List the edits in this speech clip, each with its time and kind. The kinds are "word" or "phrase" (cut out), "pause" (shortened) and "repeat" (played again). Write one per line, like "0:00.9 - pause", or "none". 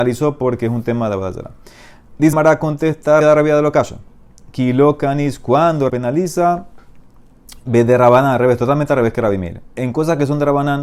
0:02.3 - word
0:03.2 - word
0:05.9 - phrase